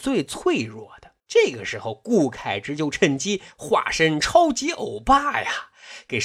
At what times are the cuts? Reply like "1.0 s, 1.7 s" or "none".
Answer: 1.2 s